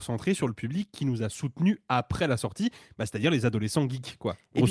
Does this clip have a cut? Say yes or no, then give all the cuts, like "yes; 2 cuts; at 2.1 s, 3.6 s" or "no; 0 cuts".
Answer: no; 0 cuts